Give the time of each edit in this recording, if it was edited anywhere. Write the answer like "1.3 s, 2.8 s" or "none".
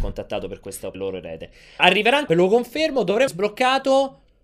0.9 s, 1.8 s, 2.3 s, 3.3 s